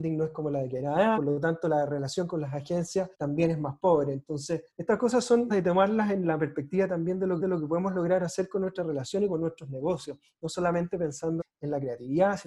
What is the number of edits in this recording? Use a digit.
6